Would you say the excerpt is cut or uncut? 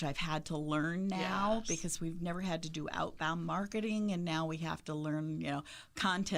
uncut